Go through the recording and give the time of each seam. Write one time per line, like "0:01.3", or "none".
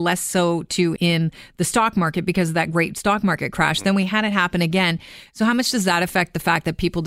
0:01.0